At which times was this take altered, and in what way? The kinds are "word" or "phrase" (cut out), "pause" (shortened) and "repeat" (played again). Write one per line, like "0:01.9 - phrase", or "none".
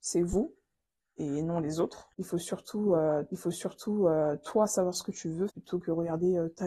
0:02.1 - pause
0:03.3 - repeat
0:05.5 - word